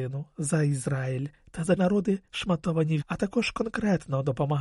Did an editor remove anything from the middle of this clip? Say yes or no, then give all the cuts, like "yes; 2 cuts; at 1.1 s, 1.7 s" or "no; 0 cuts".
yes; 2 cuts; at 1.8 s, 3.0 s